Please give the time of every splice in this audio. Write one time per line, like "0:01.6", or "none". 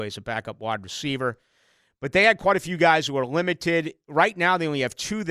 none